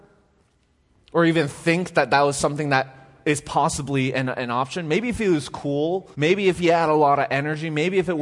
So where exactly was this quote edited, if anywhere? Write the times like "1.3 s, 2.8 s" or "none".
6.1 s